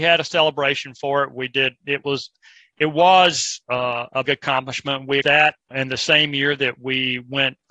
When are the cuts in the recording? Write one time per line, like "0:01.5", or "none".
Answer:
0:04.3
0:05.2
0:05.7